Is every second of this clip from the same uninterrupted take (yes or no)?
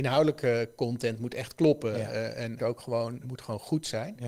no